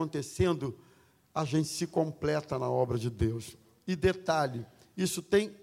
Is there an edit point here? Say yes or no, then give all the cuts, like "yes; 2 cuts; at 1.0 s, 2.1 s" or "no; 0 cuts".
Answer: no; 0 cuts